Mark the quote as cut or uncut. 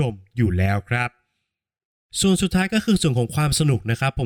uncut